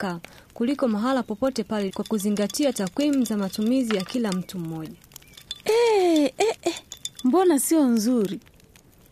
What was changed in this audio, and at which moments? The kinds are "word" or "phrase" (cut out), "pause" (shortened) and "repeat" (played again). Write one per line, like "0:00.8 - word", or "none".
0:01.9 - word